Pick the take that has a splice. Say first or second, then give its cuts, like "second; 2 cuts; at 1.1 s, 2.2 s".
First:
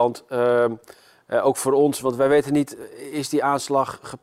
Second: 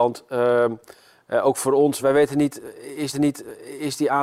second; 2 cuts; at 2.0 s, 3.1 s